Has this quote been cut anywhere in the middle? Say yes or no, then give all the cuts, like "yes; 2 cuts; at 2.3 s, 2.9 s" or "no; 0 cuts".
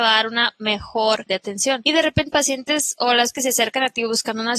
yes; 3 cuts; at 1.3 s, 2.3 s, 3.3 s